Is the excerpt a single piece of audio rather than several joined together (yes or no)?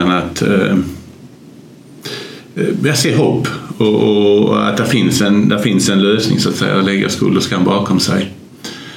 yes